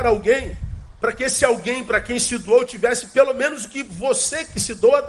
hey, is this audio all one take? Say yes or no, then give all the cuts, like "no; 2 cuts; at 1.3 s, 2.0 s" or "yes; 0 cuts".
yes; 0 cuts